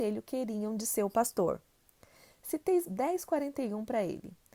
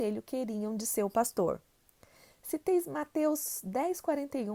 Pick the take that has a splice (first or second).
first